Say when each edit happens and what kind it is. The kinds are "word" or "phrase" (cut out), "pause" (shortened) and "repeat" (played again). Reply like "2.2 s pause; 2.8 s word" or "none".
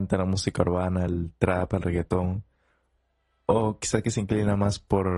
none

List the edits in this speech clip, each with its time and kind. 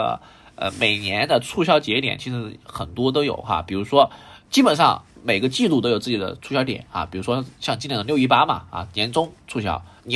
5.1 s pause

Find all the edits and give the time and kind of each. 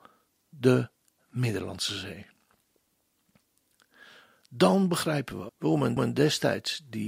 5.5 s word; 6.0 s repeat

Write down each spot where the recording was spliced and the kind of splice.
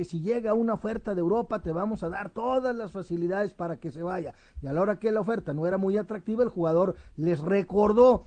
none

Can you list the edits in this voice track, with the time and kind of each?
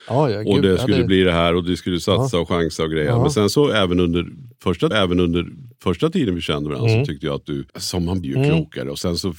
4.9 s repeat; 7.7 s pause; 8.2 s word

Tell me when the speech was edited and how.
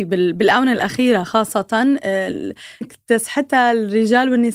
2.8 s word

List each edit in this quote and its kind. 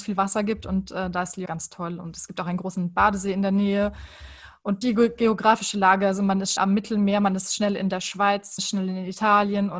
1.5 s word; 4.8 s word; 6.6 s word; 8.6 s word

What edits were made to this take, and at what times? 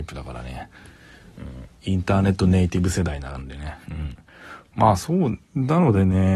3.8 s pause

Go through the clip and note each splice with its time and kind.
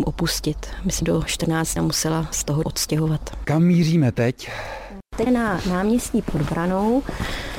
1.0 s phrase; 1.8 s phrase; 2.3 s word; 2.6 s word; 5.3 s word

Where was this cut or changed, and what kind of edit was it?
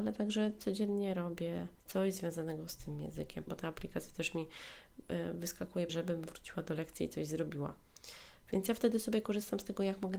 1.8 s pause; 3.5 s phrase; 5.9 s word

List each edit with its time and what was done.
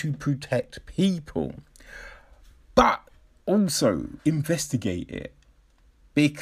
4.2 s pause

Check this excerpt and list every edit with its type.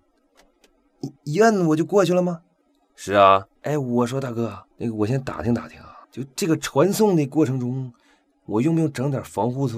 1.2 s pause; 2.6 s pause; 3.6 s pause; 4.7 s pause; 6.0 s pause

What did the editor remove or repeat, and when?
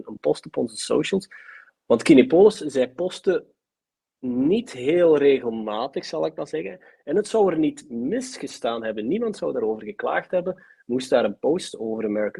none

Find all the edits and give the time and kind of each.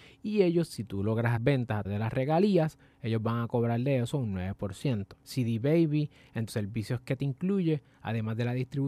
1.4 s word; 1.8 s word; 6.5 s word

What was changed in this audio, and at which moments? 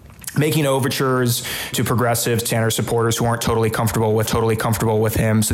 1.7 s word; 2.5 s word; 4.3 s repeat

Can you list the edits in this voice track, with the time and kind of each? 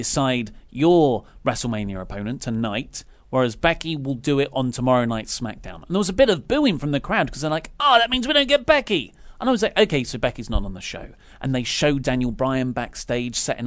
none

